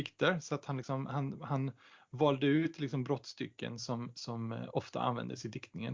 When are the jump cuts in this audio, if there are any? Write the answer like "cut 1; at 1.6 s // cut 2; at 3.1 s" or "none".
none